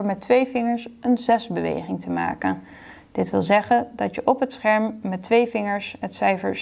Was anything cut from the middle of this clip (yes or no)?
no